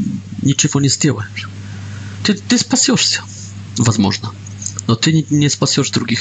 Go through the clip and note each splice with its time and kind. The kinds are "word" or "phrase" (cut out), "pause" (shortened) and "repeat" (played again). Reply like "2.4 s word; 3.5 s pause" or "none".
none